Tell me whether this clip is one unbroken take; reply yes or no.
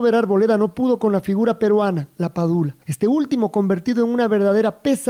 no